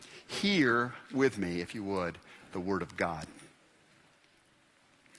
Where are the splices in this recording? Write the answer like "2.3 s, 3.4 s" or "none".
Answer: none